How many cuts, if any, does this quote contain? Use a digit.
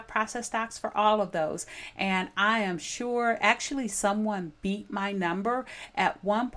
0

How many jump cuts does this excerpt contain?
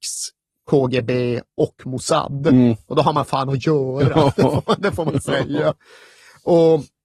0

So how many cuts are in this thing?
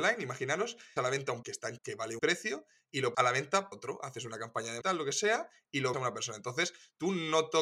8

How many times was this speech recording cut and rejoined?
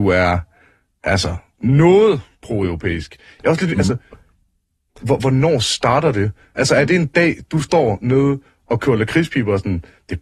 0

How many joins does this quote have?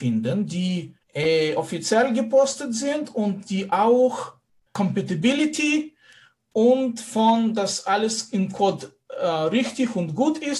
2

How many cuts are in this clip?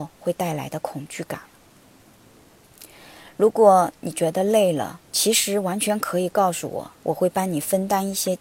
2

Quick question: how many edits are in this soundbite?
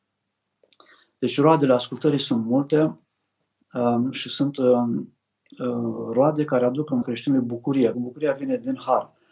2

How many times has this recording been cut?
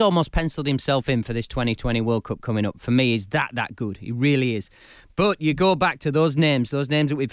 0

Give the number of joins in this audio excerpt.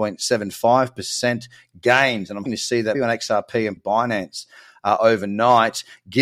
3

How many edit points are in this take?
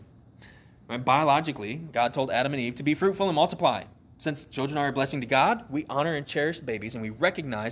0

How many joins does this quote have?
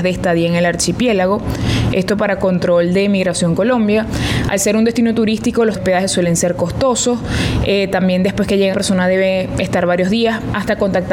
2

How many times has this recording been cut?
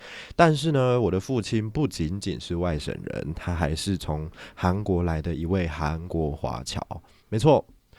0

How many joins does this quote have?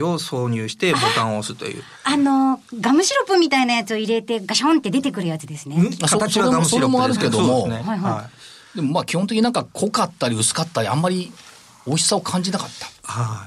0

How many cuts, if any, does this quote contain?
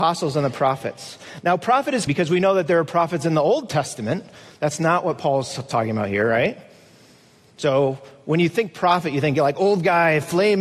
1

